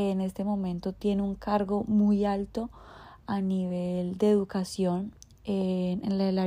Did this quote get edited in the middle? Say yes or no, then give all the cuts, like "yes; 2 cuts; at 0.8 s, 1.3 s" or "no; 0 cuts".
no; 0 cuts